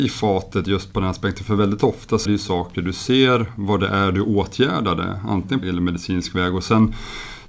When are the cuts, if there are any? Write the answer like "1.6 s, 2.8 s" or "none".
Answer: 2.3 s, 5.6 s